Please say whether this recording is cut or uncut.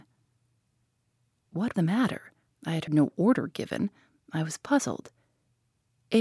cut